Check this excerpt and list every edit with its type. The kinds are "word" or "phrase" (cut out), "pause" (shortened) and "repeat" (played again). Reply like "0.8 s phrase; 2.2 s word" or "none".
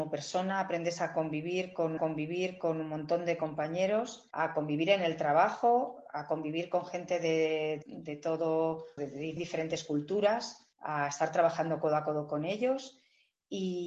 2.0 s repeat; 4.3 s pause; 7.8 s word; 9.0 s word; 9.4 s word; 10.7 s pause